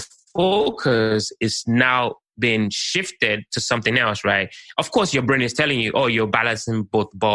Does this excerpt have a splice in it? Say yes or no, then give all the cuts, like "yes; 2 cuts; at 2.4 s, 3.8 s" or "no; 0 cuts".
no; 0 cuts